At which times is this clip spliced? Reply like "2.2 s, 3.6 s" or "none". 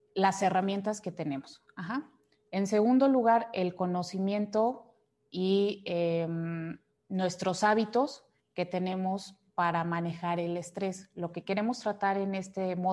none